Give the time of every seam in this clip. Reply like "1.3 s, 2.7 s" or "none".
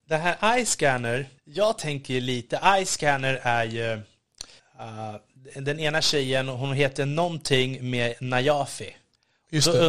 1.4 s, 4.6 s